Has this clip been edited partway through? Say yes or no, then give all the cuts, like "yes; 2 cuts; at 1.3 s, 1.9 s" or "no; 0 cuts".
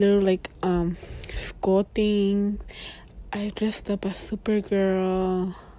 no; 0 cuts